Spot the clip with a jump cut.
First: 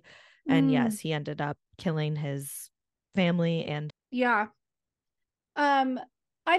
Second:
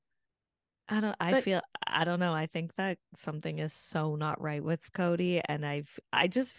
first; 1 cut; at 3.9 s

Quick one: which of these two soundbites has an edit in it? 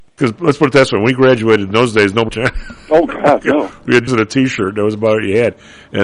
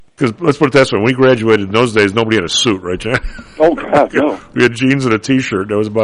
first; 2 cuts; at 2.3 s, 4.1 s

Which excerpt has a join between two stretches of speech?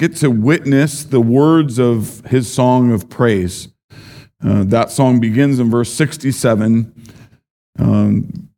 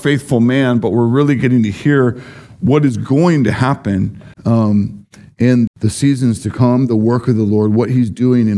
second; 2 cuts; at 4.3 s, 5.7 s

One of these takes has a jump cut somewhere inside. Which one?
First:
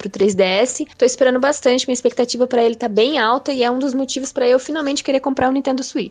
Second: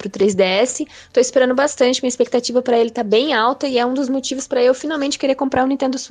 first; 1 cut; at 0.9 s

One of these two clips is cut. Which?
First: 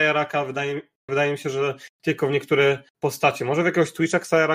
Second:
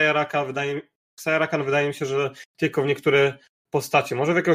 first; 2 cuts; at 1.1 s, 2.9 s

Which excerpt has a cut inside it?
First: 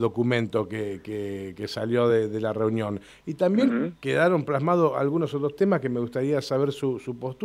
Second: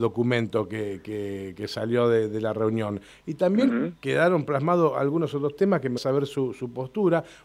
second; 1 cut; at 6.0 s

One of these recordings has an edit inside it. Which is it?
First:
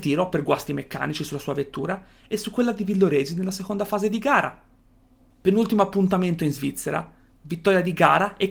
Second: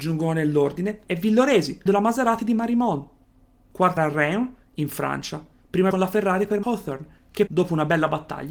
second; 6 cuts; at 1.0 s, 1.9 s, 4.0 s, 5.9 s, 6.6 s, 7.5 s

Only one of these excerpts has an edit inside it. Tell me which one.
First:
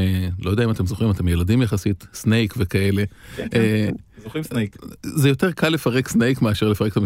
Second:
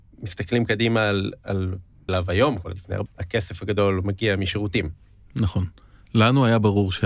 second; 3 cuts; at 2.1 s, 2.6 s, 3.1 s

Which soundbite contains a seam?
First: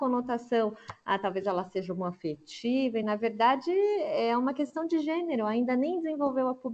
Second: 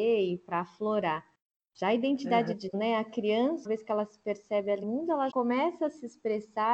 second; 4 cuts; at 2.7 s, 3.7 s, 4.8 s, 5.3 s

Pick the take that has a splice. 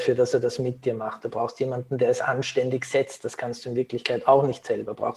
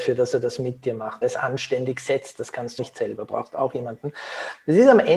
second; 2 cuts; at 1.2 s, 2.8 s

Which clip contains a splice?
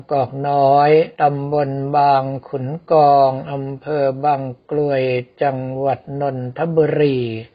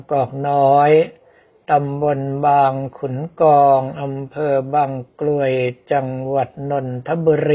first; 1 cut; at 1.1 s

